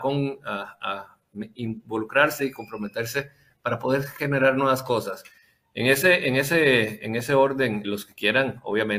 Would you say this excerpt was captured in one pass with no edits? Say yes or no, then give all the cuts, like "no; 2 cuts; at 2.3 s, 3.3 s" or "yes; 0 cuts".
no; 1 cut; at 7.8 s